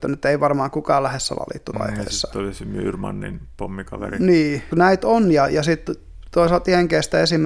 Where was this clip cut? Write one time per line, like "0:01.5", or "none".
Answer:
0:01.7
0:04.7